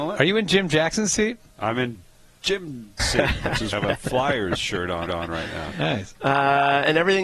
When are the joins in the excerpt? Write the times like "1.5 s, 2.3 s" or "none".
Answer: 3.0 s, 3.7 s, 5.1 s